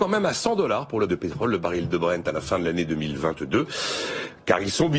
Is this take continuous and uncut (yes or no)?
no